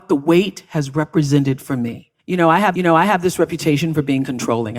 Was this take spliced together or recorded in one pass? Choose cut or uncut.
cut